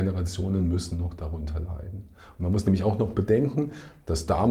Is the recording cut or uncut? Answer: uncut